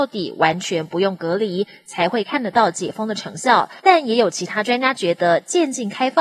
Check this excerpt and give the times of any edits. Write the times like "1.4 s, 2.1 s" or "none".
3.8 s